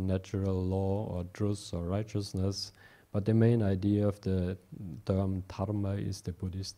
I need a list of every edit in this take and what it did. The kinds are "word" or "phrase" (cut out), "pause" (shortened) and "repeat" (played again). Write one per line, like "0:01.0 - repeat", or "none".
none

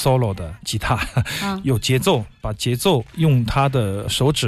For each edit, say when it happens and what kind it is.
none

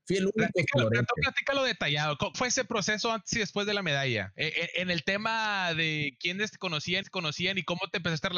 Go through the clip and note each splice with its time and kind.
0:02.3 - word
0:07.0 - repeat

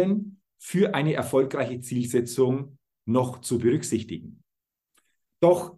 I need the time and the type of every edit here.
none

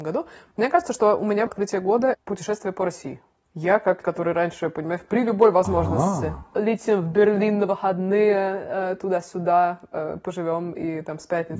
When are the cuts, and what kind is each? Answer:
0:01.5 - word
0:02.1 - word
0:04.0 - word

